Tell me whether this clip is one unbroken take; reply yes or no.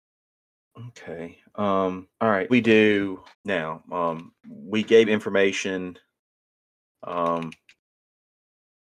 no